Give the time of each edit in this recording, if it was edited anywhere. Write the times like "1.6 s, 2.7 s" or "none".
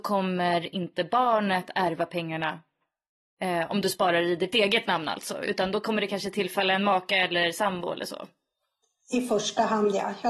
none